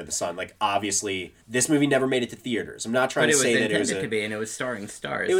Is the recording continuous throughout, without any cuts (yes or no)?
no